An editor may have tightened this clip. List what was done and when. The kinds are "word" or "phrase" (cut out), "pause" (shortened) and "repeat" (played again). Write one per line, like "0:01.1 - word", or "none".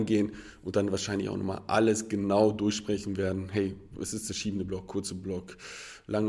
none